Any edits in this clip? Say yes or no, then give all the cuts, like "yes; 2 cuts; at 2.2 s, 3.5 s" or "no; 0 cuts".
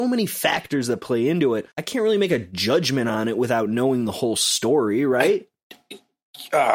yes; 1 cut; at 1.7 s